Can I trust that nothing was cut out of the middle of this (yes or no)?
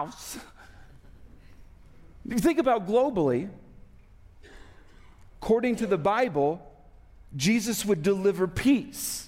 yes